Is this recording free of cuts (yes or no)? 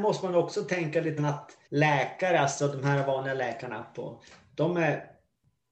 no